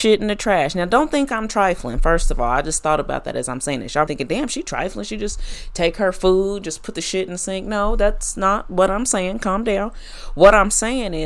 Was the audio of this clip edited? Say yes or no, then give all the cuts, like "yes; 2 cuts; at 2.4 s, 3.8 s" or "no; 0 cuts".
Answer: yes; 1 cut; at 4.1 s